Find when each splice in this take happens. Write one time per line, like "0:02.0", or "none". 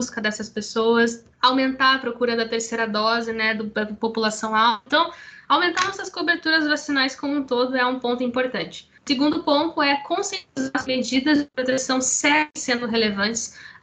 0:01.3
0:09.0
0:10.9